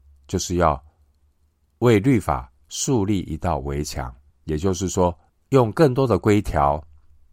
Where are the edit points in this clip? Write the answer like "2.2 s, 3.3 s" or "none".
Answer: 4.3 s, 5.3 s